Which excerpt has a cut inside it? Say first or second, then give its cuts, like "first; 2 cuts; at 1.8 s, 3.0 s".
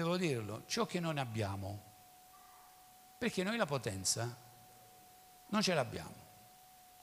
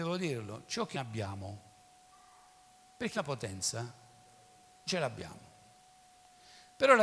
second; 3 cuts; at 0.9 s, 3.1 s, 4.9 s